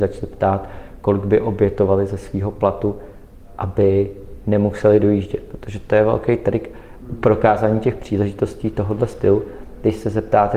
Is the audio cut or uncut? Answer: uncut